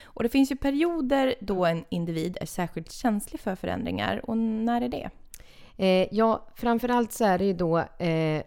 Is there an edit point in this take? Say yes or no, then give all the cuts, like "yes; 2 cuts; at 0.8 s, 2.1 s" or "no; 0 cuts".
no; 0 cuts